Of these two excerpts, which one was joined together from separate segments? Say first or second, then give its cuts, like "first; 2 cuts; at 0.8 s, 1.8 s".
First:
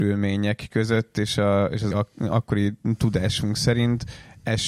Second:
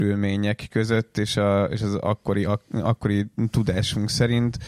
first; 1 cut; at 1.9 s